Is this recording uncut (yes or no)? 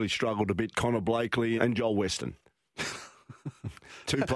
no